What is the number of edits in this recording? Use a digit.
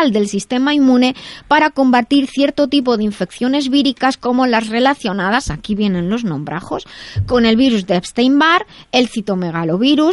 0